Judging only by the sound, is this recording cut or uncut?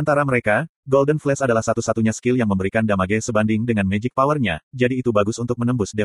uncut